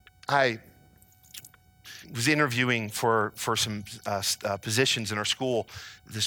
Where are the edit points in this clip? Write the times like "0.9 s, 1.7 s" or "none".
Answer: 2.0 s